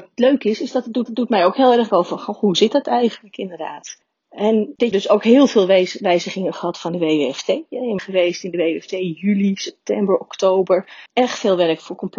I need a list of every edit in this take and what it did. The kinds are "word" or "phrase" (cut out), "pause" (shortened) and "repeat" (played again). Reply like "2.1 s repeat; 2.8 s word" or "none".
1.1 s repeat; 1.9 s word; 4.9 s phrase; 8.0 s phrase; 11.1 s pause